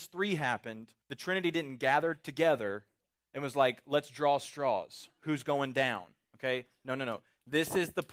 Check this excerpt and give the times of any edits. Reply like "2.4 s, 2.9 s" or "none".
1.0 s